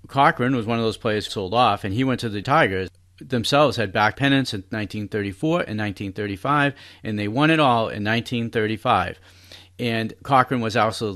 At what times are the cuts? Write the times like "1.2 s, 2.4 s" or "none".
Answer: 1.3 s, 2.4 s, 4.1 s